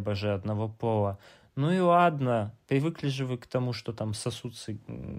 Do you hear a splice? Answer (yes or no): no